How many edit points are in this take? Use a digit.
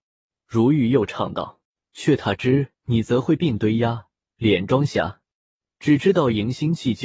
2